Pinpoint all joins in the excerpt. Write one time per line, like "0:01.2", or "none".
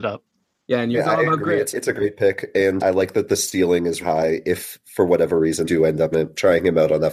0:00.9
0:01.7
0:02.8
0:04.0
0:05.6
0:06.1